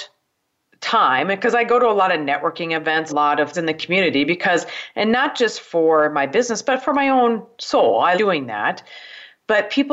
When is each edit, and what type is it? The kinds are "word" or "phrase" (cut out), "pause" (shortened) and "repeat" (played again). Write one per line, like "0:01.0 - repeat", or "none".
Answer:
0:03.1 - phrase
0:03.5 - word
0:08.2 - word